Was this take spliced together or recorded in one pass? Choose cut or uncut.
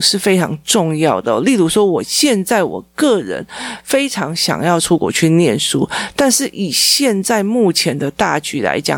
uncut